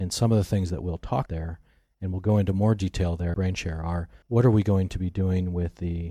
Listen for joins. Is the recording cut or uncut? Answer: cut